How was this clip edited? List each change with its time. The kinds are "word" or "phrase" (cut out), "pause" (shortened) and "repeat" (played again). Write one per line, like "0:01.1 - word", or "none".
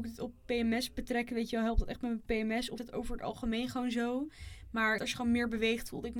0:02.8 - word
0:05.0 - word